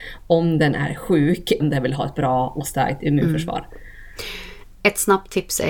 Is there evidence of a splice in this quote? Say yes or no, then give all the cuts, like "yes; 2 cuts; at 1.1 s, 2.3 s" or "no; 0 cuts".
yes; 1 cut; at 1.6 s